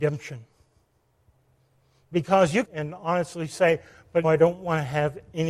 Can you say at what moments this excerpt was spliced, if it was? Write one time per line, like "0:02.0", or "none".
0:02.6
0:04.2

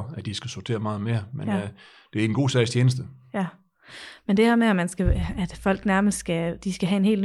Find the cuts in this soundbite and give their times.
none

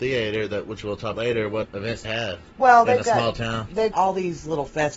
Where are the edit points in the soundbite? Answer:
0:01.1
0:01.6
0:02.0
0:03.9

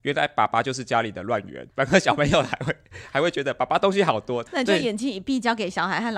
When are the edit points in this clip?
0:01.7

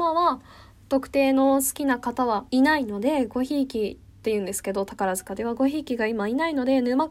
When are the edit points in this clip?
0:02.5

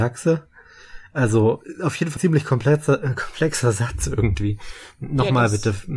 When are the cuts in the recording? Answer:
0:02.2

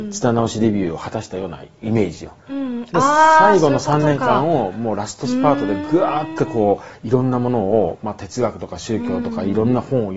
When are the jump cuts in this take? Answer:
0:02.4

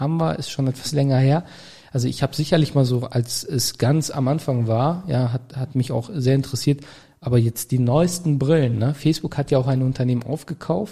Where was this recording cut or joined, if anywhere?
none

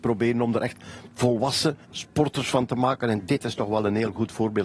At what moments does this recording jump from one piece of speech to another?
0:01.8

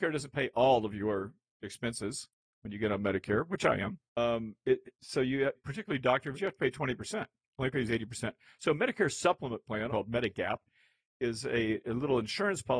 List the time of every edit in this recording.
0:04.1
0:05.5
0:06.3
0:09.9

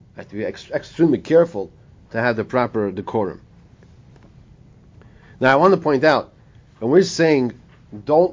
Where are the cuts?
none

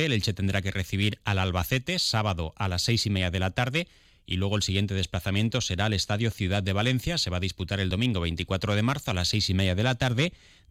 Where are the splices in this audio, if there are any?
none

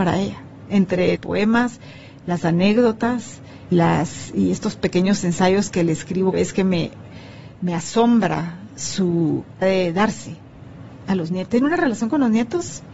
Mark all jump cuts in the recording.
0:01.2
0:03.7
0:06.3
0:09.6

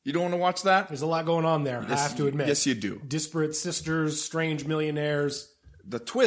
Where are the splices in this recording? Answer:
none

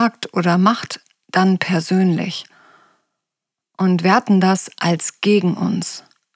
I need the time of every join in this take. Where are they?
none

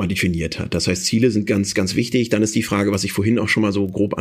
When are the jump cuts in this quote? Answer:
none

